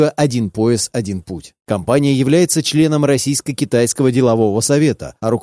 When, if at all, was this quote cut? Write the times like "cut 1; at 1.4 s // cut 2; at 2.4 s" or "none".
none